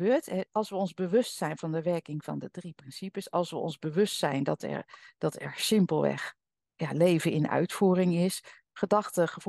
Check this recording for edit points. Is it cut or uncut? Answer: uncut